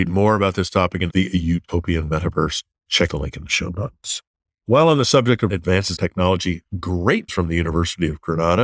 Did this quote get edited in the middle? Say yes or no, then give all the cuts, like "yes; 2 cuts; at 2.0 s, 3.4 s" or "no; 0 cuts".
yes; 5 cuts; at 1.1 s, 3.1 s, 5.5 s, 6.0 s, 7.3 s